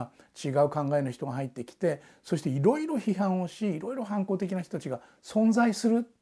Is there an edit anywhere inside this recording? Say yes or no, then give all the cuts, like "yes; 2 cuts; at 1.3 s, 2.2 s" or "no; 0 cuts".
no; 0 cuts